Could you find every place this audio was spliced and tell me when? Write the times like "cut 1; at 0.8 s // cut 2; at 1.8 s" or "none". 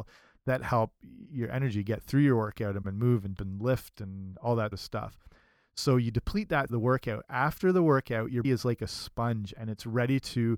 cut 1; at 2.8 s // cut 2; at 3.4 s // cut 3; at 4.7 s // cut 4; at 6.7 s // cut 5; at 8.4 s